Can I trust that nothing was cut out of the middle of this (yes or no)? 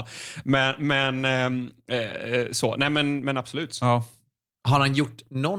yes